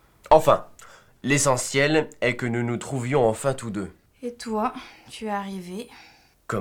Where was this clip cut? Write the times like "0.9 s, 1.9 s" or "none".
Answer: none